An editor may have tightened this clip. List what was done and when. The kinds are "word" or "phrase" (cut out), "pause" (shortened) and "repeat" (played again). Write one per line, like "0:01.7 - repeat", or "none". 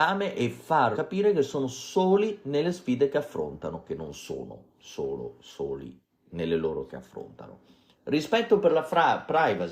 0:00.9 - word
0:06.9 - word

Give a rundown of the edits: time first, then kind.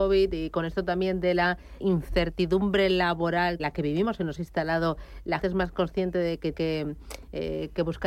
0:01.8 - word
0:03.6 - word
0:04.4 - word
0:05.4 - word
0:06.5 - word

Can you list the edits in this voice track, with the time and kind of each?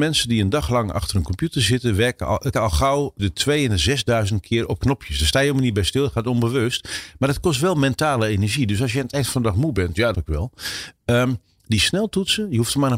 0:02.5 - word
0:03.2 - word
0:10.1 - word

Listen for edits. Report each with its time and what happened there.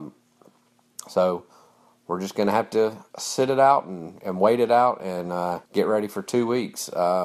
0:03.1 - pause
0:05.7 - pause

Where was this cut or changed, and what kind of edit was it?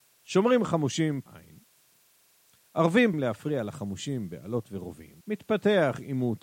0:01.3 - word
0:03.1 - word
0:05.2 - pause

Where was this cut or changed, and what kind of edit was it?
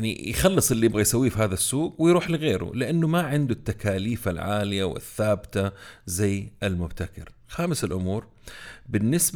none

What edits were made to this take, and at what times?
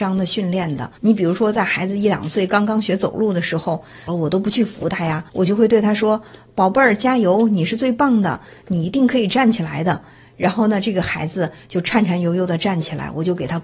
0:01.0 - pause
0:04.1 - phrase
0:05.3 - pause

